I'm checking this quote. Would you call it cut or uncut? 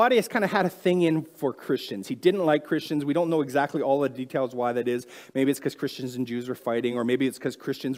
uncut